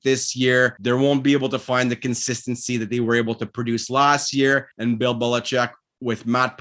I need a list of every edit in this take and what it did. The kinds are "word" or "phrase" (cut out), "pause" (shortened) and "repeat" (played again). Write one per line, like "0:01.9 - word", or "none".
0:04.7 - pause